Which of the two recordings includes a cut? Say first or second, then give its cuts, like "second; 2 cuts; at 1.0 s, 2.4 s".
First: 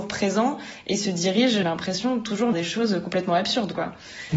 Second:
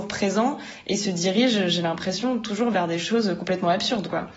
first; 2 cuts; at 1.6 s, 2.5 s